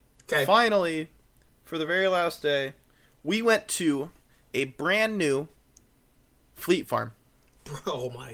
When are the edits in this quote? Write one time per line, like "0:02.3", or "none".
none